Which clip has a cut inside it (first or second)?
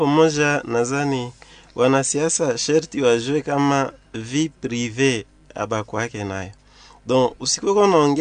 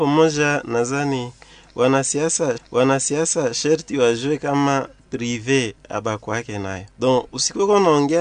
second